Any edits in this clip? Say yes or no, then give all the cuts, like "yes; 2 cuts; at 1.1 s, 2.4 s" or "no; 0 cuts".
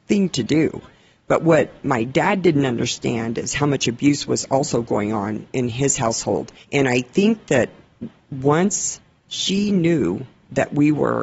yes; 1 cut; at 6.6 s